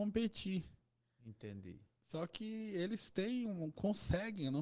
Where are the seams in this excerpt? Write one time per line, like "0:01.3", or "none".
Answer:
none